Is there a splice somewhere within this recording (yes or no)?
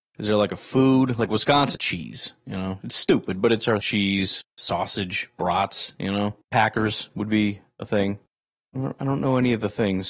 yes